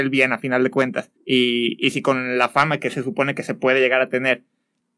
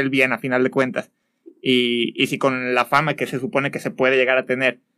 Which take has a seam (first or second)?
first